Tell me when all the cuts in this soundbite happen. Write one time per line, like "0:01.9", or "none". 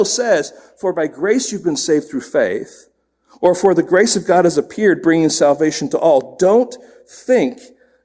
none